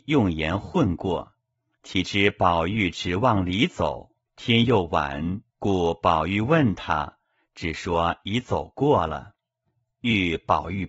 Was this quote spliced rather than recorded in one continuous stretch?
yes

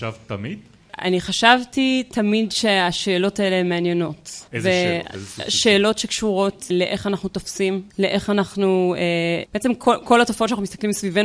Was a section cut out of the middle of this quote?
yes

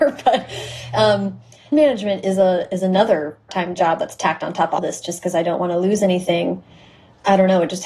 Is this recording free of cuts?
no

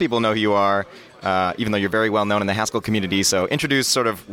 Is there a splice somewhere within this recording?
no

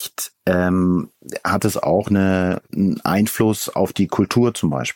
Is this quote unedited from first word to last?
yes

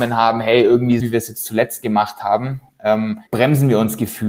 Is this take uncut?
no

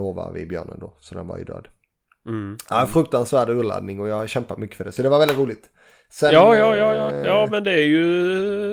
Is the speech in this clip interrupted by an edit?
no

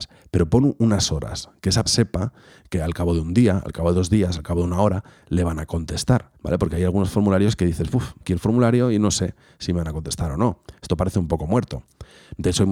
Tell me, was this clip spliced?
yes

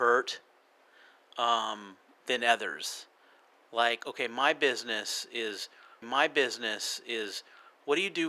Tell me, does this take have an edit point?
yes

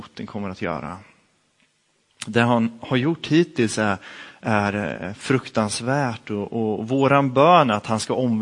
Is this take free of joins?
yes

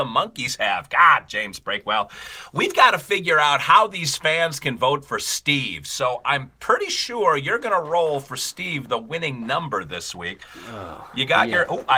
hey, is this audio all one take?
yes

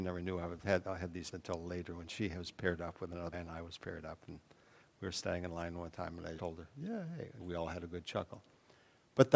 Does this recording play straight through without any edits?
no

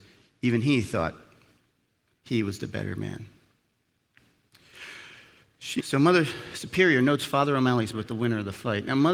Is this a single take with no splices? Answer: no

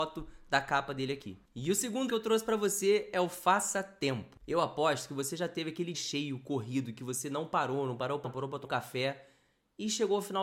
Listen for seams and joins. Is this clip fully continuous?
no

